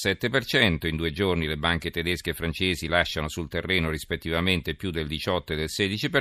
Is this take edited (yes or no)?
no